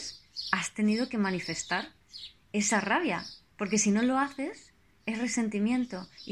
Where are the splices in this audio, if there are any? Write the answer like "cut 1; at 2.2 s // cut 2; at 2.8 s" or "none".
none